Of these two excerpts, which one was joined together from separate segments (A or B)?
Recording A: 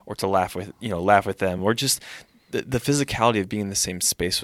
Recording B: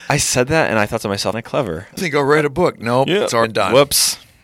B